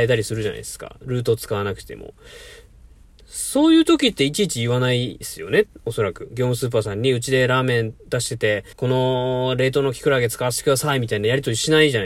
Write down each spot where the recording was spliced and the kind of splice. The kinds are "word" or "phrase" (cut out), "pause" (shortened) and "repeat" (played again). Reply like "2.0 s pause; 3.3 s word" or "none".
8.0 s pause; 8.7 s pause